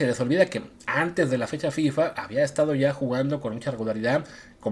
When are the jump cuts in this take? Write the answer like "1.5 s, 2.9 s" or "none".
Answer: none

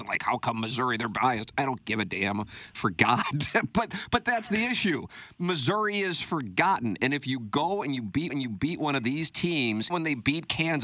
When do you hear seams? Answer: 2.7 s, 8.3 s, 9.9 s

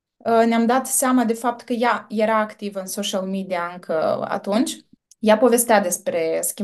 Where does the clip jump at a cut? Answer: 5.0 s

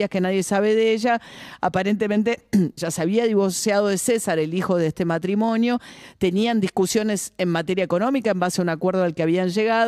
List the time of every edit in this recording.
2.8 s

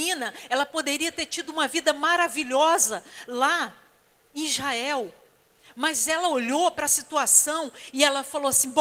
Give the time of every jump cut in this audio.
none

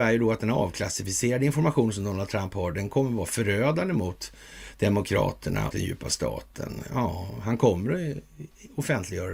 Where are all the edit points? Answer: 5.7 s

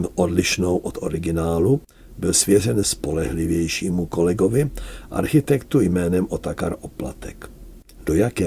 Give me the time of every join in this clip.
2.8 s

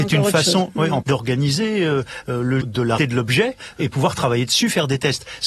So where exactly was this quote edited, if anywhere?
1.0 s, 2.6 s, 3.0 s

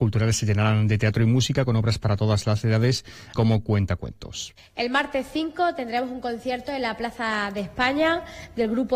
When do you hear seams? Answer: 3.3 s, 4.6 s

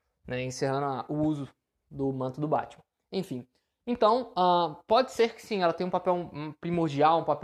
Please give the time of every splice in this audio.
none

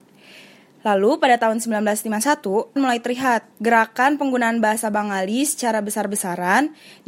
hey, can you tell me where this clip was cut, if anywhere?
2.8 s, 3.5 s

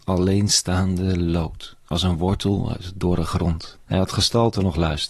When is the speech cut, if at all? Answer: 3.8 s

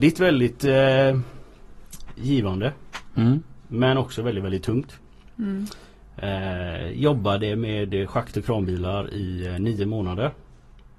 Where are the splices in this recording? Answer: none

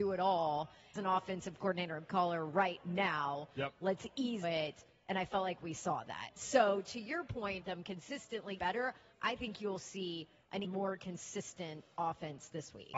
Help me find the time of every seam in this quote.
0.9 s, 2.1 s, 4.4 s, 7.6 s, 8.6 s, 10.6 s

